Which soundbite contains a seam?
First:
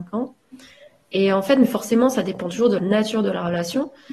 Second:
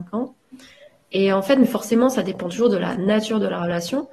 first; 1 cut; at 2.8 s

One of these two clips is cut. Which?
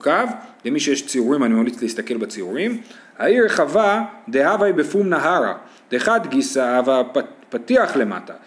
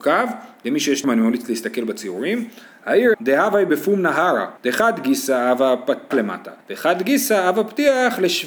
second; 5 cuts; at 1.0 s, 3.1 s, 4.6 s, 6.1 s, 6.6 s

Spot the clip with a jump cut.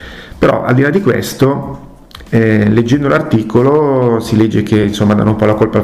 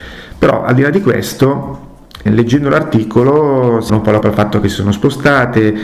second; 3 cuts; at 2.3 s, 3.9 s, 4.2 s

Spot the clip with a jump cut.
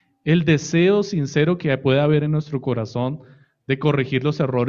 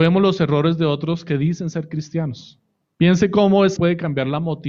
second; 2 cuts; at 2.8 s, 3.8 s

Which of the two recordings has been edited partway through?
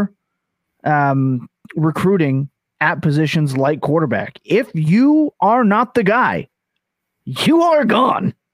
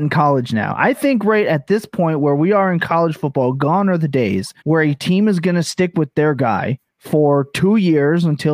second; 2 cuts; at 4.6 s, 6.9 s

